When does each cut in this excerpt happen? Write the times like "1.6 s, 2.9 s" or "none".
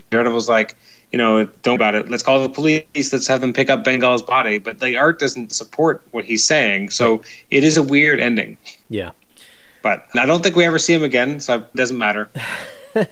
1.8 s, 10.1 s, 11.7 s